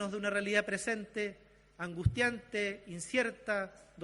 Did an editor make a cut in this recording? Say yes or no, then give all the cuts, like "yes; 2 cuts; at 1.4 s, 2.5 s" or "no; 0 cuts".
no; 0 cuts